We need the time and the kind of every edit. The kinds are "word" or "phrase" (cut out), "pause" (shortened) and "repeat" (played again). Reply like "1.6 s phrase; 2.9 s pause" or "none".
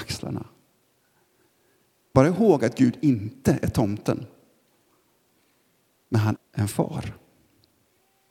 2.1 s word; 6.4 s word